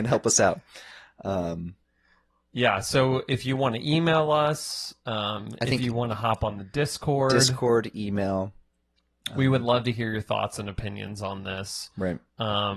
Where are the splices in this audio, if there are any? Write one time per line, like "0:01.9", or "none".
none